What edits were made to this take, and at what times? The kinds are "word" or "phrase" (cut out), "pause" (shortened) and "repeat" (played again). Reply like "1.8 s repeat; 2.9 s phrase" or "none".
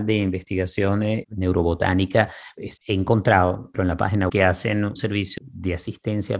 1.2 s word; 2.8 s word; 3.7 s word; 4.3 s word; 5.0 s word; 5.4 s word